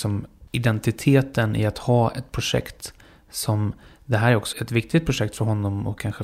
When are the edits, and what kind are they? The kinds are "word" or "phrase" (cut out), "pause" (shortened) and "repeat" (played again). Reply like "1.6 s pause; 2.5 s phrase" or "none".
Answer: 4.5 s word